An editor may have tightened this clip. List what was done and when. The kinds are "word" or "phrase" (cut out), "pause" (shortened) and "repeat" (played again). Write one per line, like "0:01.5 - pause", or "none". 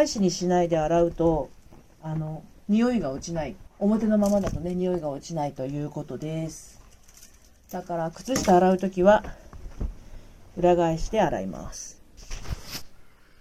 0:03.7 - pause